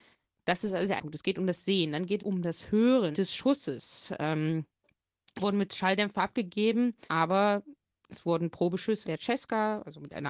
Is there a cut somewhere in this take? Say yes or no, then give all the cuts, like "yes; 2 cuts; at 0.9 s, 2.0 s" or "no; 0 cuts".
yes; 6 cuts; at 1.0 s, 2.2 s, 3.1 s, 5.4 s, 7.1 s, 9.0 s